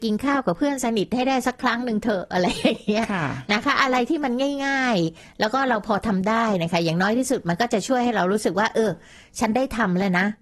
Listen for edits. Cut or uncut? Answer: uncut